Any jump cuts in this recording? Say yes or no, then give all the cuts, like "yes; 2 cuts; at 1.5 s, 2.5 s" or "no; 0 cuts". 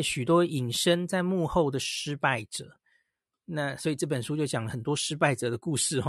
no; 0 cuts